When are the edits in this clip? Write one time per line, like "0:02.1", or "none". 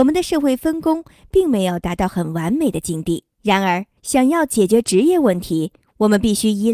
0:03.3
0:04.0